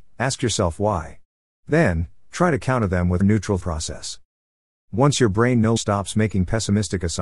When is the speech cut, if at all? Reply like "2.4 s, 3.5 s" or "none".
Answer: 3.2 s, 3.6 s, 5.8 s